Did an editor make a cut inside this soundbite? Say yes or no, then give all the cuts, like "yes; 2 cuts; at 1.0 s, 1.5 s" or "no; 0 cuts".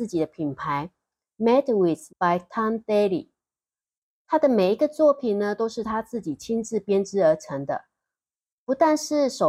yes; 1 cut; at 2.1 s